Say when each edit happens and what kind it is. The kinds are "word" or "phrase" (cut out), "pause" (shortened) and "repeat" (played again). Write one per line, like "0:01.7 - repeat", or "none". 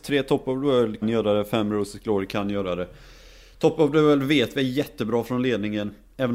0:01.0 - word